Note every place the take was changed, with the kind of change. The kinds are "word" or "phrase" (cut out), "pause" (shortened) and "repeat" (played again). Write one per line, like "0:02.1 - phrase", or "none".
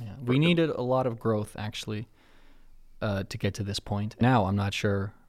0:04.2 - word